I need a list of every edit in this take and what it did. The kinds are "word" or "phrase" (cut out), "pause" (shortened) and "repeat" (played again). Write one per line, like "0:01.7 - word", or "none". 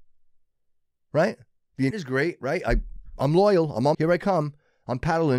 0:01.9 - word
0:03.9 - phrase